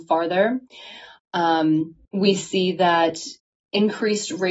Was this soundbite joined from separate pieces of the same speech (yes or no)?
yes